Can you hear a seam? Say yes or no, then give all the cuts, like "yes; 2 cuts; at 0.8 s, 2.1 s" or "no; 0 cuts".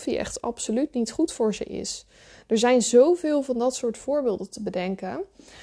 no; 0 cuts